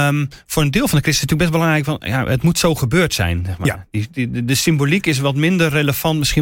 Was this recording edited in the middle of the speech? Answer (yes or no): no